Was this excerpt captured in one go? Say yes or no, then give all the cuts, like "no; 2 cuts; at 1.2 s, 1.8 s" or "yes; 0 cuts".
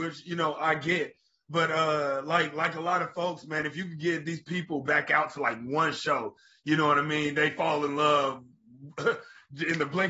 yes; 0 cuts